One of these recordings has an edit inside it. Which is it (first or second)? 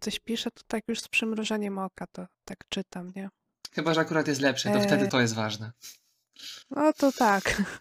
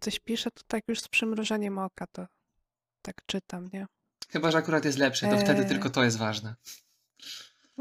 first